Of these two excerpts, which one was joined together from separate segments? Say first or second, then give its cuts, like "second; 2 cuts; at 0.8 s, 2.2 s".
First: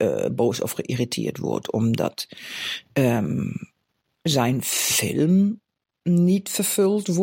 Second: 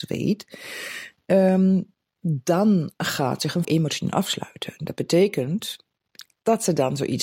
second; 1 cut; at 3.6 s